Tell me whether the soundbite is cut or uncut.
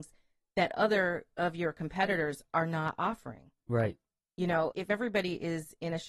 cut